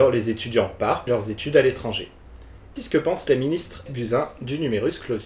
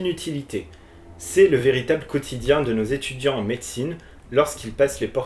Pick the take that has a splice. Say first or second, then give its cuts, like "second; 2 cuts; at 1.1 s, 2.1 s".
first; 3 cuts; at 1.1 s, 2.8 s, 3.9 s